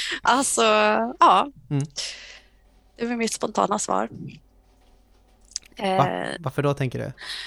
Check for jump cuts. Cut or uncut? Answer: uncut